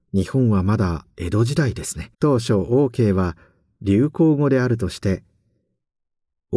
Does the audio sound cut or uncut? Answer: cut